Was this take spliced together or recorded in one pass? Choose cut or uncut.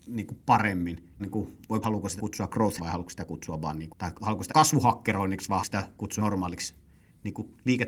cut